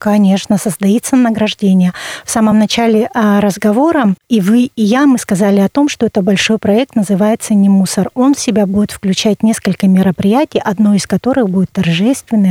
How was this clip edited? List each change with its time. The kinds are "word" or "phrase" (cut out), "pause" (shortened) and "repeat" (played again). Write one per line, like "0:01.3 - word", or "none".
none